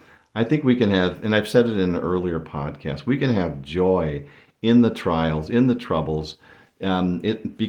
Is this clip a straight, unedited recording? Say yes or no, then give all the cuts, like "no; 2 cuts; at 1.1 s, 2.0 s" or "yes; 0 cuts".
yes; 0 cuts